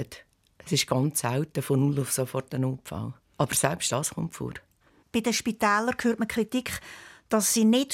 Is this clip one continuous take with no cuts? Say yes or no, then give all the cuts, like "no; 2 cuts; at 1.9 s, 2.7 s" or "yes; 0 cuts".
yes; 0 cuts